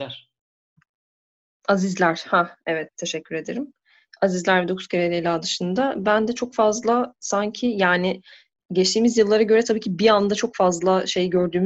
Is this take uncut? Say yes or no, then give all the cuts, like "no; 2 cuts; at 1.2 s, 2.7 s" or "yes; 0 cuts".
yes; 0 cuts